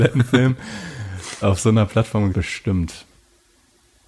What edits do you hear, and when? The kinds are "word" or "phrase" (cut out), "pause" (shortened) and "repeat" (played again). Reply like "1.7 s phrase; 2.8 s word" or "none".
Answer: 1.4 s word; 2.3 s phrase